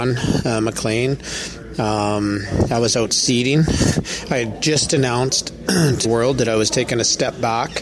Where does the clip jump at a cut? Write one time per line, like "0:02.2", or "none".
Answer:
0:06.0

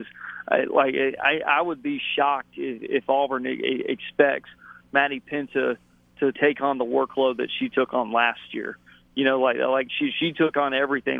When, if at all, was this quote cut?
0:06.3

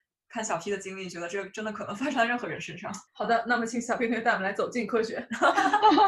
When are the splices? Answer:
0:03.1

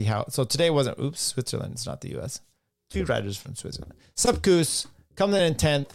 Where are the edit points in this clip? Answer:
none

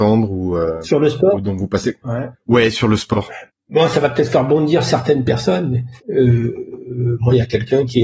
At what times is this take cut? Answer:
0:03.5
0:06.0

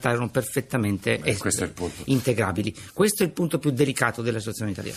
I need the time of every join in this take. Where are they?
none

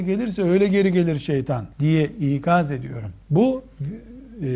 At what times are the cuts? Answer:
0:01.7
0:03.2

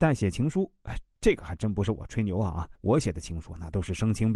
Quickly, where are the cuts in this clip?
0:02.8

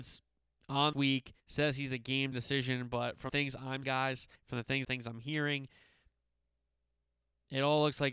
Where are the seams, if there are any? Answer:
0:00.9
0:01.4
0:02.3
0:03.3
0:03.8
0:04.4
0:04.8

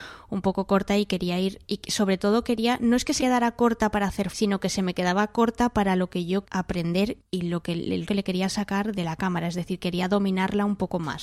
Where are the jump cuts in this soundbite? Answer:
0:03.2
0:04.3
0:06.4
0:07.2
0:08.1
0:08.9

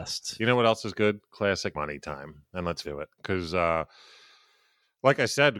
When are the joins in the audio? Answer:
0:01.7
0:02.8

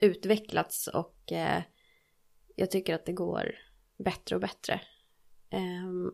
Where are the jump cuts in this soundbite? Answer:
none

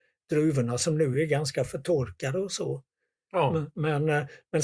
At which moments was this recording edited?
none

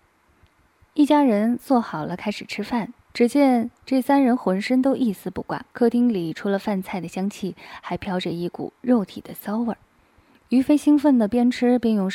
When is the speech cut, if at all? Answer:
0:03.0
0:05.7

